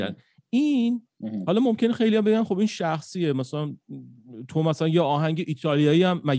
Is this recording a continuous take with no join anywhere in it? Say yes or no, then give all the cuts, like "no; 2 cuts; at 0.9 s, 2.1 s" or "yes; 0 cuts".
yes; 0 cuts